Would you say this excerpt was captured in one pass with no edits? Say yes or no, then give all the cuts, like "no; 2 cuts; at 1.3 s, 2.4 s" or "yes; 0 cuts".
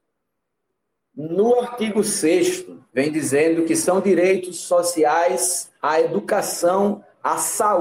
no; 2 cuts; at 2.9 s, 5.7 s